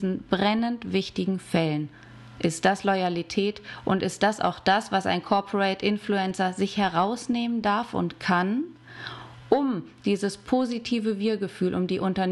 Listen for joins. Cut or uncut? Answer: uncut